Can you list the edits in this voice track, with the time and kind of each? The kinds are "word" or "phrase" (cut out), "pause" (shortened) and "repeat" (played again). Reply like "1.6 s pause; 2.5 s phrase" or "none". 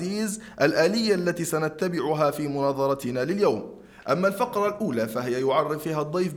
none